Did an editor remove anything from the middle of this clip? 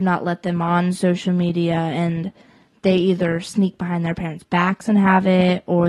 no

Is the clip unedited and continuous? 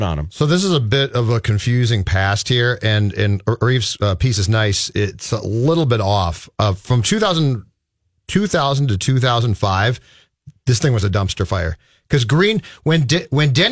yes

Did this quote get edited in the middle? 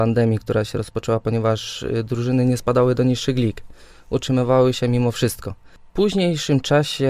no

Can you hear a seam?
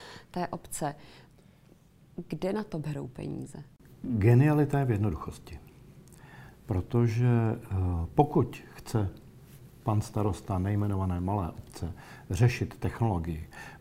no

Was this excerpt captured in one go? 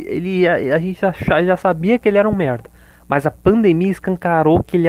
yes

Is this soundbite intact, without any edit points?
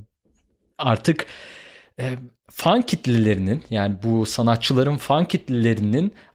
yes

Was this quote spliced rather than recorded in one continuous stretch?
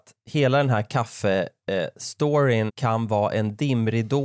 yes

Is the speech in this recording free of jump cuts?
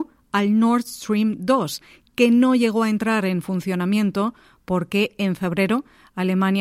yes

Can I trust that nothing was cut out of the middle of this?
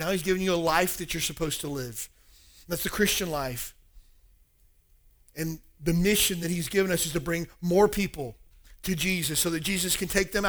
yes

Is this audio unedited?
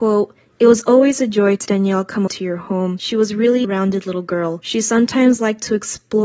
no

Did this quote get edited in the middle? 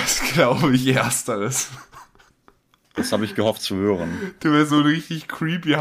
no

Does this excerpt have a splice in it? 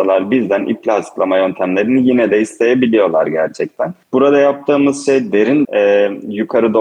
yes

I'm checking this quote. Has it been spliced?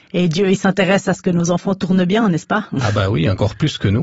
no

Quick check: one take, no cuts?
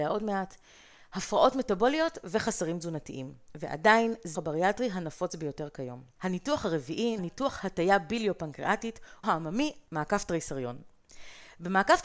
no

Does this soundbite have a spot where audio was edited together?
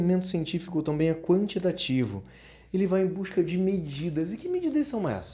no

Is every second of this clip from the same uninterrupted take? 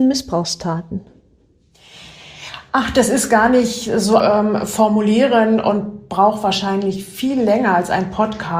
no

